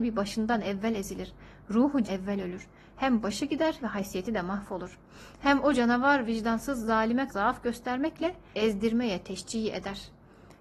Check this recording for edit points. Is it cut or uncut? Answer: cut